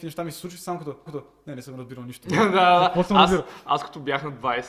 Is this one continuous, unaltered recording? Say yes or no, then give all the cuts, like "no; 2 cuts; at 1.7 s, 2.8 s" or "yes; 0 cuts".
no; 1 cut; at 1.1 s